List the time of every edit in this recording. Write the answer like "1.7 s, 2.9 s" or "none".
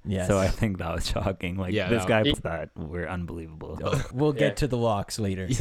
2.3 s, 4.1 s